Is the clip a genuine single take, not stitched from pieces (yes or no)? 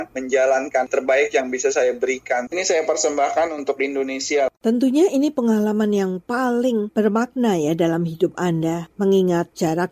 yes